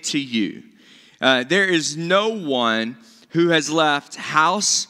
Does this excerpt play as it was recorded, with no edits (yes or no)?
yes